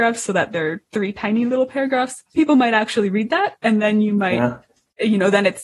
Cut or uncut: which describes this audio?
cut